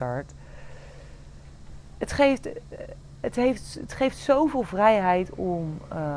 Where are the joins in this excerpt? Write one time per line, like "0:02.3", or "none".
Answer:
none